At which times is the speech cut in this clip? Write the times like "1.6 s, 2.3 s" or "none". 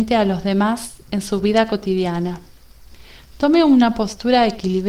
none